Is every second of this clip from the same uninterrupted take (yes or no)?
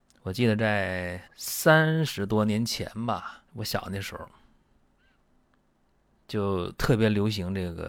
no